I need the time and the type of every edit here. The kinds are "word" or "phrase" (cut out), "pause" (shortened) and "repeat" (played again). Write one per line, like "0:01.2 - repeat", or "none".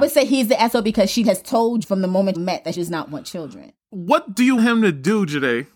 0:01.2 - word
0:01.8 - word
0:02.3 - word
0:02.7 - word
0:04.6 - word